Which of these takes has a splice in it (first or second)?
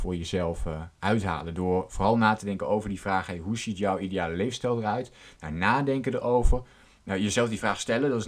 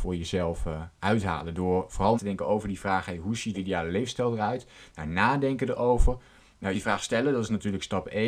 second